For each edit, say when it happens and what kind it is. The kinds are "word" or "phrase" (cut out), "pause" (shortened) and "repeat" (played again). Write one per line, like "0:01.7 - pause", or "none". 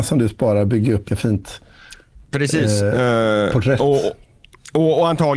0:01.1 - word